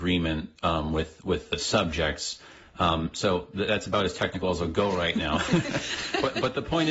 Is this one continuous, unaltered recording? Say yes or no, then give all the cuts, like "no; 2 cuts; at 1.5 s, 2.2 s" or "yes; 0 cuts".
yes; 0 cuts